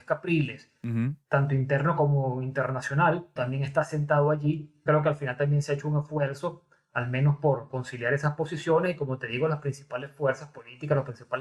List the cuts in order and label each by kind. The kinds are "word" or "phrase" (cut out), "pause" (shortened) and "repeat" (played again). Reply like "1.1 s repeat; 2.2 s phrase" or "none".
3.4 s word; 4.9 s word